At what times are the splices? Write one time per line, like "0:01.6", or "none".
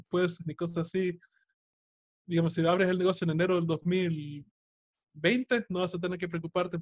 none